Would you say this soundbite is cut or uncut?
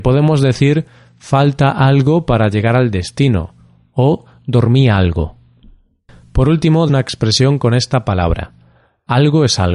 cut